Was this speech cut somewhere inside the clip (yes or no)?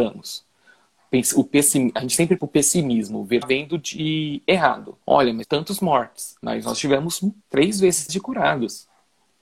yes